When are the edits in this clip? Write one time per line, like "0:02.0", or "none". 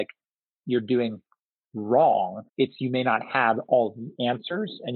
0:02.5